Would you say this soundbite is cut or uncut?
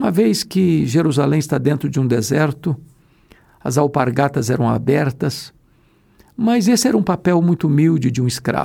uncut